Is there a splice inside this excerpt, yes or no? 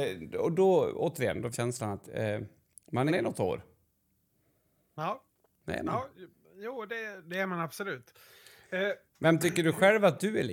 yes